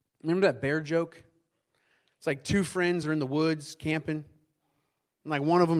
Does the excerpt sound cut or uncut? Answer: uncut